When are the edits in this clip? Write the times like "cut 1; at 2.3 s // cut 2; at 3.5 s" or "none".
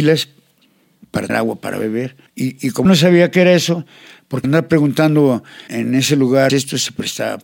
cut 1; at 1.3 s // cut 2; at 2.3 s // cut 3; at 2.8 s // cut 4; at 4.4 s // cut 5; at 5.7 s // cut 6; at 6.5 s